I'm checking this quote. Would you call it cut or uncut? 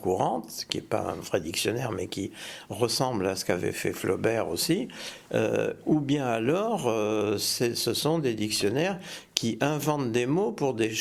uncut